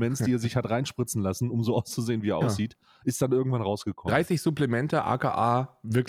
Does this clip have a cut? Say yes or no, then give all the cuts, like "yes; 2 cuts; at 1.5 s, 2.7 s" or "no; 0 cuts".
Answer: no; 0 cuts